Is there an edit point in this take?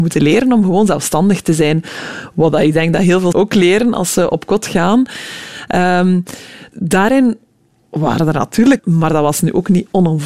yes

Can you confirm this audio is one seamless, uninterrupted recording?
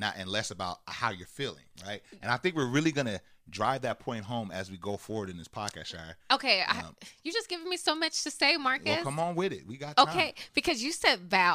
yes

